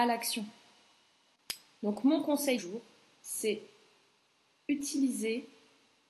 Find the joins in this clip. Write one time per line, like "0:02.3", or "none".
0:02.6